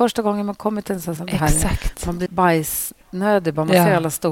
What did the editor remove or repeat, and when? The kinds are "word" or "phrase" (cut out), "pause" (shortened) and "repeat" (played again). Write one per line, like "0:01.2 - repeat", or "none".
0:01.2 - phrase
0:02.3 - word
0:03.0 - pause